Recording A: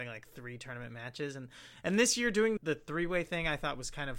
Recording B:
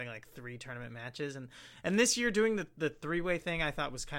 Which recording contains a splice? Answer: A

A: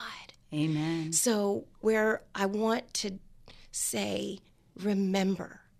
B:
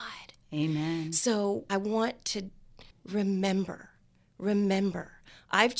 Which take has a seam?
B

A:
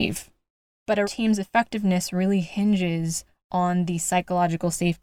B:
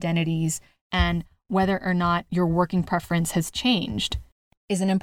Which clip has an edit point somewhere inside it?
A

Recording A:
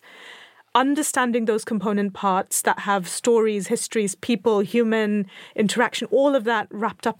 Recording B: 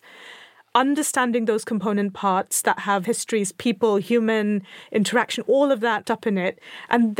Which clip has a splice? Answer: B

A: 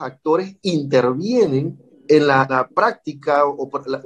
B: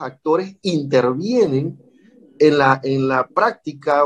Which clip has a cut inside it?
A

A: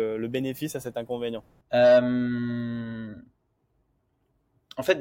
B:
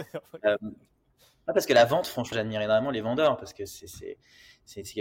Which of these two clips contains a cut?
B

